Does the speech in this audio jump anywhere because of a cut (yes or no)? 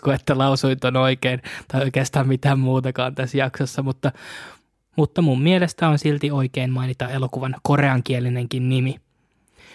no